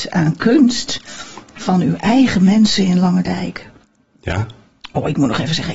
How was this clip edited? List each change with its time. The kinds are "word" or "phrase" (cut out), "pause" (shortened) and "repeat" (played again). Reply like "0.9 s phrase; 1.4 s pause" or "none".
none